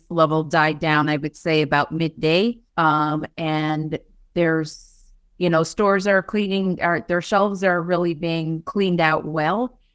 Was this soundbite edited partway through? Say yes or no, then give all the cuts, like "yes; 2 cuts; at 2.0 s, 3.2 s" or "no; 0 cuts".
yes; 1 cut; at 2.7 s